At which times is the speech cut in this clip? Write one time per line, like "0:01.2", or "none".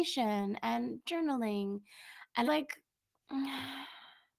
0:02.4